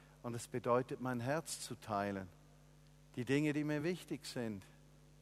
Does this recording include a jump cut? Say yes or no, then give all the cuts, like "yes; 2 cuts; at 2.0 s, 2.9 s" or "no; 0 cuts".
no; 0 cuts